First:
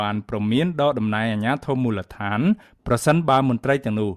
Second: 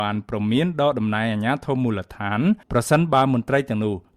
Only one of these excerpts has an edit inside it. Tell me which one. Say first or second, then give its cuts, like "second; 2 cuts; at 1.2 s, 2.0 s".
second; 1 cut; at 2.6 s